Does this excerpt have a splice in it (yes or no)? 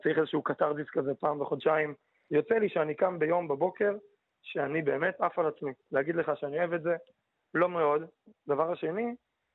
yes